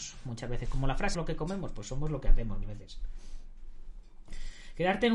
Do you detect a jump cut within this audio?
yes; 2 cuts; at 1.1 s, 2.6 s

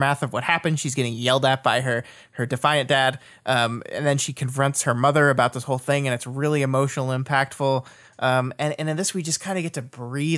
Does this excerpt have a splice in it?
no; 0 cuts

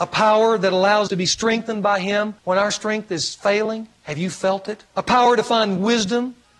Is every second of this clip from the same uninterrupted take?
no; 4 cuts; at 1.1 s, 2.4 s, 4.0 s, 4.9 s

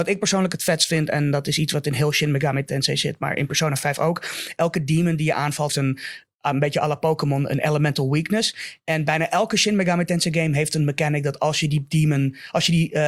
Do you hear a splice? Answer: yes; 1 cut; at 5.7 s

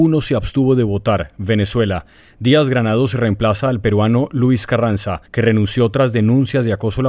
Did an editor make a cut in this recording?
yes; 1 cut; at 5.3 s

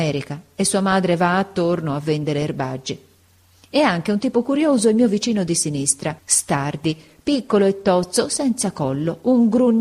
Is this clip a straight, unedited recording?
no; 1 cut; at 6.2 s

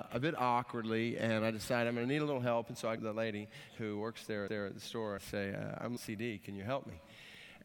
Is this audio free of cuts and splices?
no; 4 cuts; at 3.0 s, 4.5 s, 5.2 s, 6.0 s

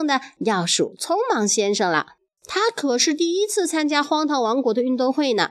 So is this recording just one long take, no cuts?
yes; 0 cuts

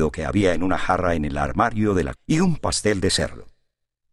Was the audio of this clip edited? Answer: yes; 2 cuts; at 2.1 s, 2.6 s

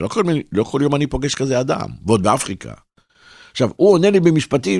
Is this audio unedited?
yes; 0 cuts

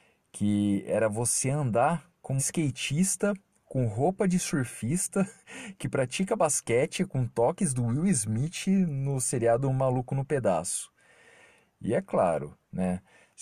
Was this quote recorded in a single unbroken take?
no; 1 cut; at 2.4 s

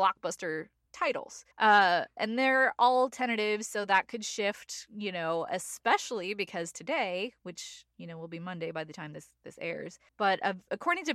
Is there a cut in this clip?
yes; 2 cuts; at 1.5 s, 10.1 s

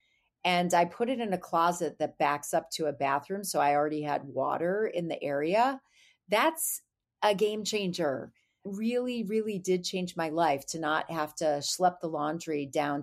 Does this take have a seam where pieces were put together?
no; 0 cuts

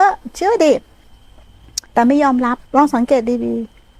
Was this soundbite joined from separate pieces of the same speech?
yes; 2 cuts; at 1.9 s, 2.7 s

